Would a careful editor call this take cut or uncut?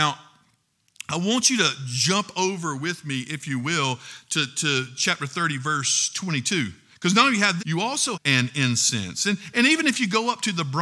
cut